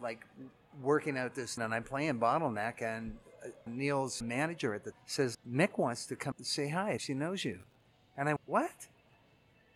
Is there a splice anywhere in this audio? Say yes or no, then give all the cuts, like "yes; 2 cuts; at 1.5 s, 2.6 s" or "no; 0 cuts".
yes; 8 cuts; at 1.6 s, 3.7 s, 4.2 s, 4.9 s, 5.3 s, 6.3 s, 7.0 s, 8.4 s